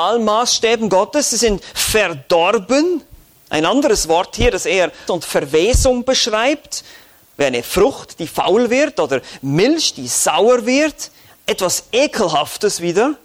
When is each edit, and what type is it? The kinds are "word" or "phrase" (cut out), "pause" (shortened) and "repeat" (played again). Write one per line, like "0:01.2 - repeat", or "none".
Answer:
0:05.1 - word